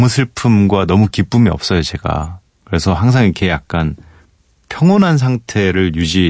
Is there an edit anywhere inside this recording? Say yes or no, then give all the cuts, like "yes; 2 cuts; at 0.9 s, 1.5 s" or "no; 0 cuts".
no; 0 cuts